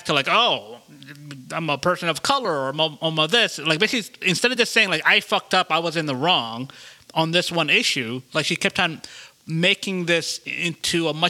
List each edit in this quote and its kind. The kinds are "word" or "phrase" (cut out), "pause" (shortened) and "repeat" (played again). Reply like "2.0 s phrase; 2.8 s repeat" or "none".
none